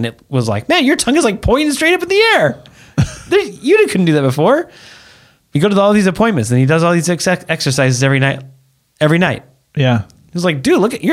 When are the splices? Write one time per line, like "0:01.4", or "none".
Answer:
none